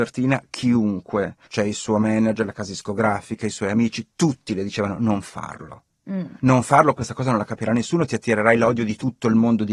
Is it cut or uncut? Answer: cut